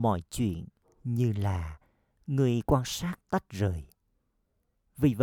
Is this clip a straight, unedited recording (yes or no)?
yes